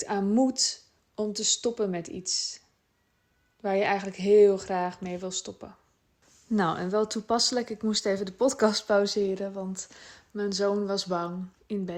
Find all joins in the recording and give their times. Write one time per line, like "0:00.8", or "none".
none